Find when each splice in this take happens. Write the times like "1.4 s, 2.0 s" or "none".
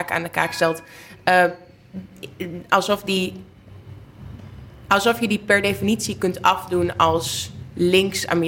none